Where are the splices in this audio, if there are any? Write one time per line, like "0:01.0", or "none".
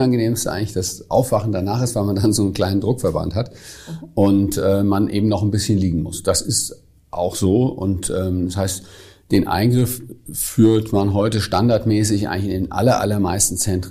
none